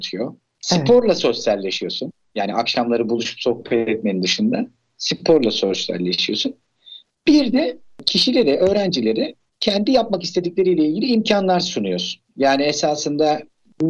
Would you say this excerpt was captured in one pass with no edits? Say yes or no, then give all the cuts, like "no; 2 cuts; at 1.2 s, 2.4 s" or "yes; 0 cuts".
yes; 0 cuts